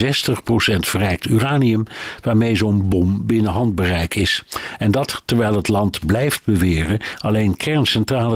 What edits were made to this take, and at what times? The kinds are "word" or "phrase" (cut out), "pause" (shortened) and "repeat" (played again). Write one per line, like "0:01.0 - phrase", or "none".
none